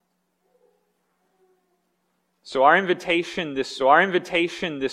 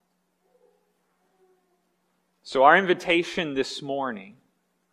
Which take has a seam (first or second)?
first